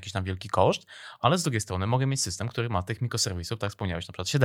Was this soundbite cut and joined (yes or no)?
no